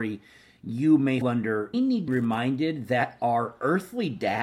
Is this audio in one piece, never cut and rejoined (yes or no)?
no